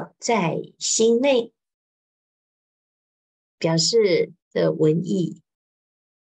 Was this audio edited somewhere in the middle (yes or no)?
yes